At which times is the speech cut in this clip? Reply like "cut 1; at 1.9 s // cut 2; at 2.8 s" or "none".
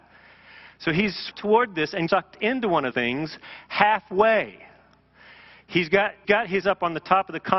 cut 1; at 1.3 s // cut 2; at 2.1 s // cut 3; at 2.9 s // cut 4; at 6.2 s // cut 5; at 6.6 s